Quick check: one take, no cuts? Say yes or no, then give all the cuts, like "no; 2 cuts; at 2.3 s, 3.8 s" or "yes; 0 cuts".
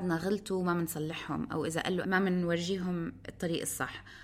no; 1 cut; at 2.0 s